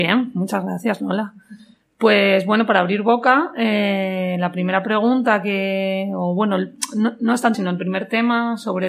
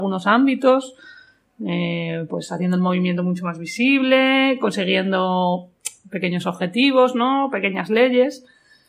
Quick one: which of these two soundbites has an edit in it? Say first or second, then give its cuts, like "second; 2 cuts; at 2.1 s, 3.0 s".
first; 1 cut; at 7.5 s